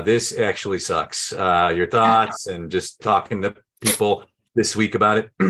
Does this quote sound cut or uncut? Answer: uncut